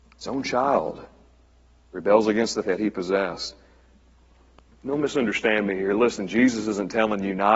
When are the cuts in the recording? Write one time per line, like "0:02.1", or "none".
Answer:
0:02.6